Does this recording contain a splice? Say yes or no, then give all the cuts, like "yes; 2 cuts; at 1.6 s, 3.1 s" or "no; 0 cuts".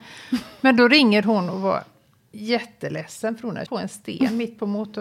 yes; 1 cut; at 3.7 s